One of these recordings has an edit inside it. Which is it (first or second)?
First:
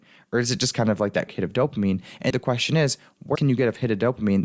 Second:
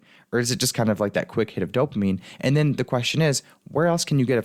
first